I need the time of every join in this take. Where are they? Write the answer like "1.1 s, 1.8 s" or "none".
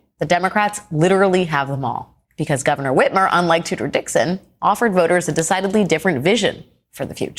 2.2 s